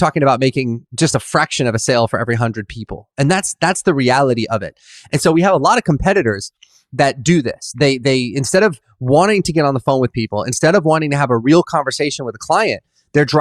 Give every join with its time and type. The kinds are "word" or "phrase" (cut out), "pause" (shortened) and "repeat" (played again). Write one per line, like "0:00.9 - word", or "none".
none